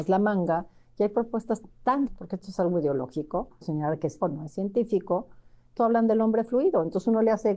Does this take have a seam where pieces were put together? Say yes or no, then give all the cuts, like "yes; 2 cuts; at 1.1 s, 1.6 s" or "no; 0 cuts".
yes; 4 cuts; at 2.1 s, 3.6 s, 4.2 s, 5.8 s